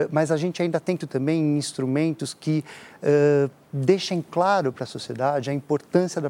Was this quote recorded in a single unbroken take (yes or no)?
no